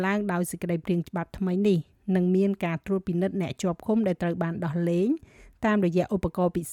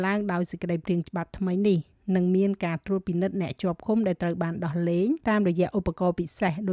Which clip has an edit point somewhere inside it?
second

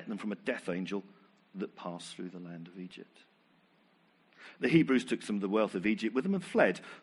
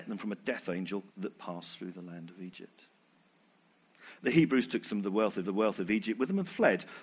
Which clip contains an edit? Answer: second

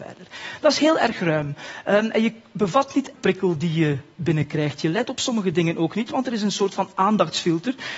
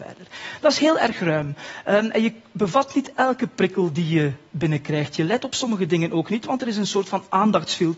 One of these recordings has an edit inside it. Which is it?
first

